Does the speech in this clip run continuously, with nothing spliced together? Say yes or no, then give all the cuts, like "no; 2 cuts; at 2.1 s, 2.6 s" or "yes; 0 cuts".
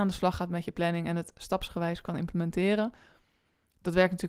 yes; 0 cuts